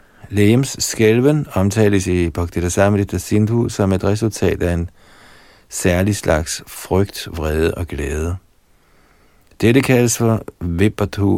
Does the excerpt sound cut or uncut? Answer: uncut